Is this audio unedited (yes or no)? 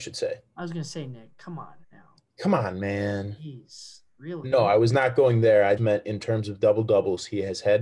no